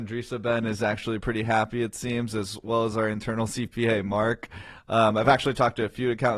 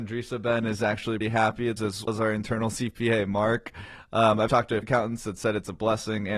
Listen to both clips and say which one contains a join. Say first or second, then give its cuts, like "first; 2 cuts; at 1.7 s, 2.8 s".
second; 5 cuts; at 1.2 s, 1.8 s, 2.1 s, 4.5 s, 4.8 s